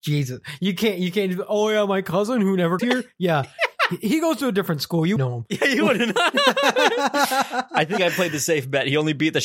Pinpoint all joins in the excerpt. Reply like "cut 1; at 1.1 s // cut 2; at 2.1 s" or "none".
cut 1; at 2.8 s // cut 2; at 5.2 s